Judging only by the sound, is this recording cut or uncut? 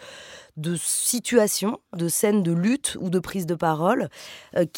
uncut